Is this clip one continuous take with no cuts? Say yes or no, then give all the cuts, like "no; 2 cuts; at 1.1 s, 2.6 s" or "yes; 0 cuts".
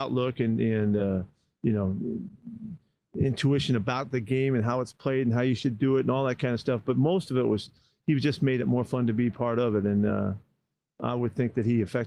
yes; 0 cuts